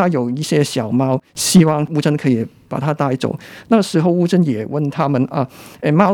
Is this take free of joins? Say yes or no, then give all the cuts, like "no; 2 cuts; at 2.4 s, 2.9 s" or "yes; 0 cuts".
yes; 0 cuts